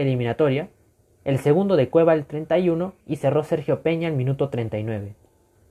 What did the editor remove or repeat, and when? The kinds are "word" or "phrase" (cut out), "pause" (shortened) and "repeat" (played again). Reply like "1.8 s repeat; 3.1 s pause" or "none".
1.0 s pause; 3.0 s pause